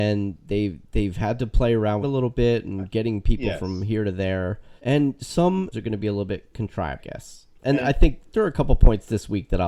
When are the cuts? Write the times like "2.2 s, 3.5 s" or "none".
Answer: 2.0 s, 4.8 s, 5.7 s, 7.0 s, 7.6 s, 8.3 s